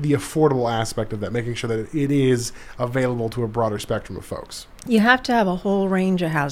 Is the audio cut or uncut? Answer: uncut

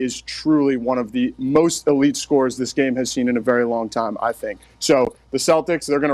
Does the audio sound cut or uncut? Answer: uncut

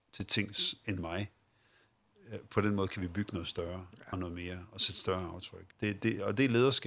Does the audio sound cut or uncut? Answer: cut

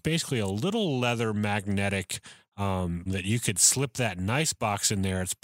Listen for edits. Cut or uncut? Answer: cut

